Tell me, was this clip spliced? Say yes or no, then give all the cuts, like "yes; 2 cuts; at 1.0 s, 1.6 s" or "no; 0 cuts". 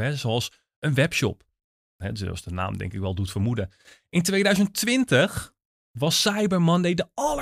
no; 0 cuts